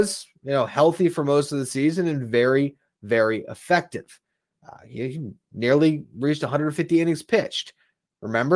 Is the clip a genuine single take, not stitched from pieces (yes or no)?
yes